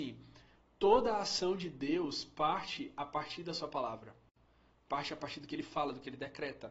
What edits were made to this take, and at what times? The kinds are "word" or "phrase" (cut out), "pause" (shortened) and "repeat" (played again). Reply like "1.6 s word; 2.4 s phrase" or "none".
none